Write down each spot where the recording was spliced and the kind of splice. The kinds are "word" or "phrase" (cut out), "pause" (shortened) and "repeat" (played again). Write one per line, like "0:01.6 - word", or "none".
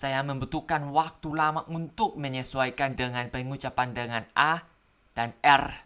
0:03.0 - word